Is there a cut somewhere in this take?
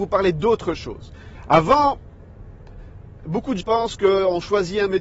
yes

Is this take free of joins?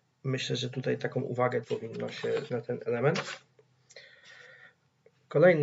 no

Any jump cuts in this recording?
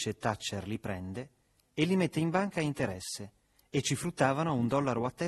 no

